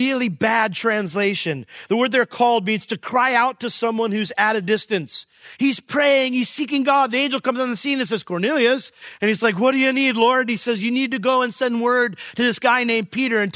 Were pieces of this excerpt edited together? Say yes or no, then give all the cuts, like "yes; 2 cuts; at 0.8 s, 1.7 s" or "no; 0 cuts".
no; 0 cuts